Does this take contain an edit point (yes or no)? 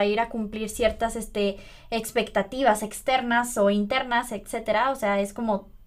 no